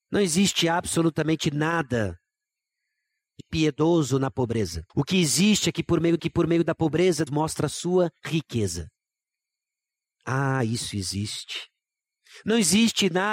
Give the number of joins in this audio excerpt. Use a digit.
4